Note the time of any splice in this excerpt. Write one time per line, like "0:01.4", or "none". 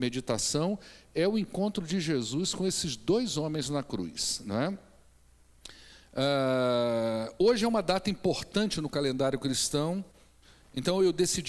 none